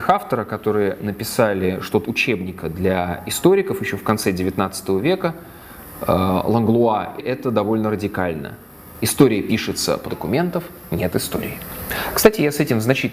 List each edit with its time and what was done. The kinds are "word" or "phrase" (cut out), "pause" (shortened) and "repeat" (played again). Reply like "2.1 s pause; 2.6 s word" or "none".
2.0 s word; 7.2 s phrase; 10.0 s phrase